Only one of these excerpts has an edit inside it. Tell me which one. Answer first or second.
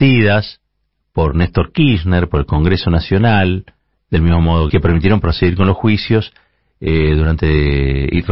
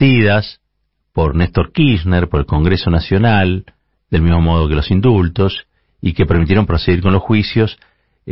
first